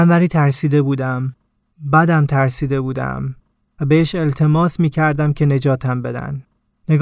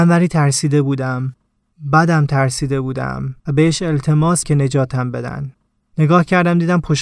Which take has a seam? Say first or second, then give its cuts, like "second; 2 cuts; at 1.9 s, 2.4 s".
second; 2 cuts; at 3.4 s, 4.4 s